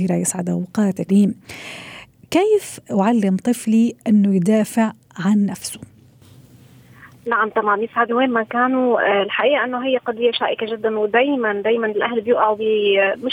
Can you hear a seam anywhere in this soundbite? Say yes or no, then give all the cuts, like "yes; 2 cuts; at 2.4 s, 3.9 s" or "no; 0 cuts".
yes; 2 cuts; at 1.1 s, 8.1 s